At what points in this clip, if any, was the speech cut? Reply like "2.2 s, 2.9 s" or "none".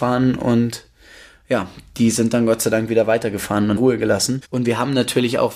3.8 s